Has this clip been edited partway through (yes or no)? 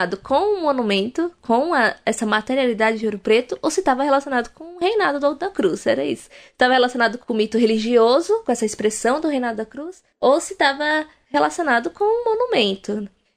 no